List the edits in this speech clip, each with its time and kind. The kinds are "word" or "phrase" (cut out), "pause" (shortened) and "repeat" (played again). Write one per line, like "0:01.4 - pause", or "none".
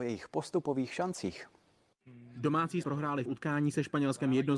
0:02.8 - word
0:03.3 - phrase